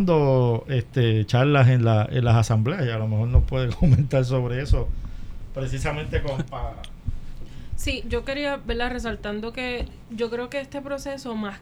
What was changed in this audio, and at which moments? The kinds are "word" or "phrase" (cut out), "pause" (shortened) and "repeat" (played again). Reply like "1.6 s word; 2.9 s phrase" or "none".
10.0 s pause

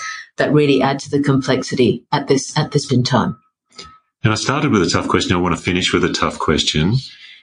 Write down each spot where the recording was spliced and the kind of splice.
2.9 s word

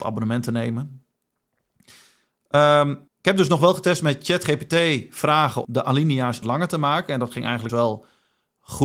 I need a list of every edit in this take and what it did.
3.1 s pause; 5.6 s word; 6.4 s phrase; 7.7 s word

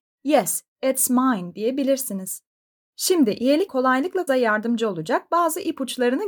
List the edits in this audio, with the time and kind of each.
3.7 s word; 4.3 s word

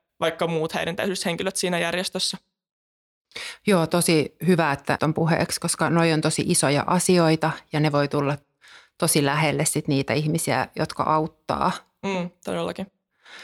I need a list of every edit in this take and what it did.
5.0 s word

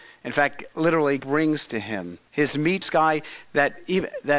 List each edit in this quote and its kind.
1.2 s word; 2.3 s pause; 2.8 s phrase

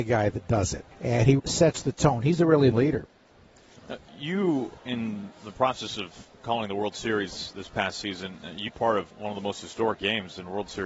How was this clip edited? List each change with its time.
0.9 s pause; 1.4 s word; 2.7 s phrase; 4.1 s word; 4.8 s pause; 8.7 s word; 9.1 s pause

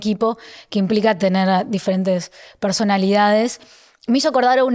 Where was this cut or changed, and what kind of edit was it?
none

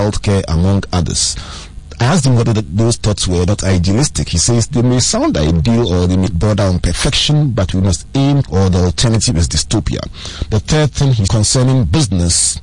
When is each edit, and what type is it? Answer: 6.3 s word; 8.4 s phrase; 11.3 s word

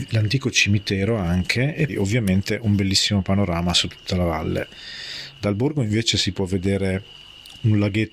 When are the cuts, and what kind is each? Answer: 1.9 s word

